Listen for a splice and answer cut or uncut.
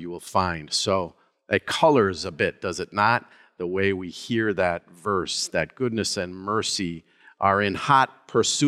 uncut